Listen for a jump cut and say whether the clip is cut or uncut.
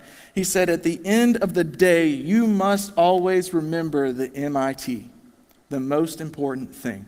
uncut